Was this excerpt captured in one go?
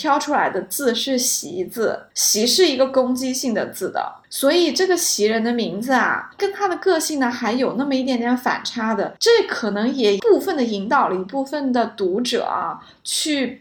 no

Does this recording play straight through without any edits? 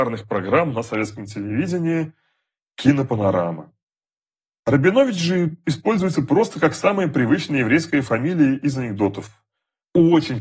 yes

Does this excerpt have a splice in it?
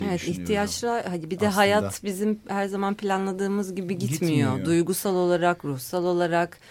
no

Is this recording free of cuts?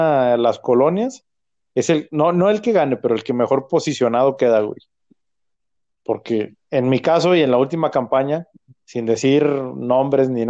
yes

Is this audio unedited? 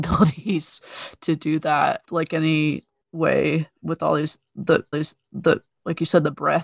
no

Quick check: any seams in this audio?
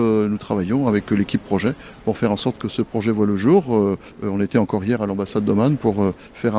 no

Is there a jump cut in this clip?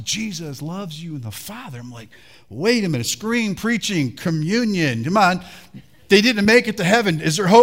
no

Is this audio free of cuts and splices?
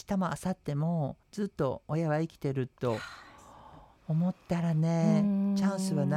no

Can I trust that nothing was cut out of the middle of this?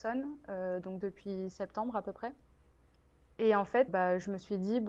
no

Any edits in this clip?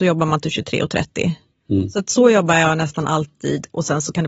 no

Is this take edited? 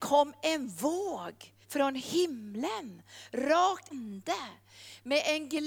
yes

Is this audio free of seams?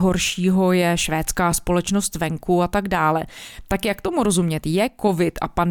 yes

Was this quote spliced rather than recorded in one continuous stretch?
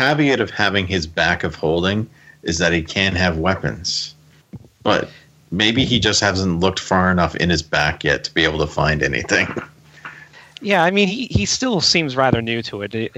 no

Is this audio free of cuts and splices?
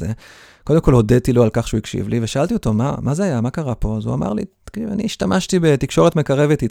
yes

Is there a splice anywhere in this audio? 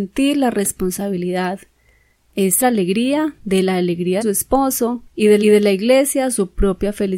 yes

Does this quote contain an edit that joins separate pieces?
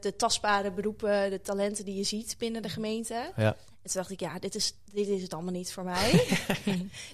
no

